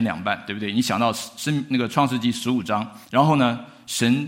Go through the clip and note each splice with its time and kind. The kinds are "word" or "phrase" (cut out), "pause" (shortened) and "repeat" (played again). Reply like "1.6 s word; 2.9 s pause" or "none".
3.0 s pause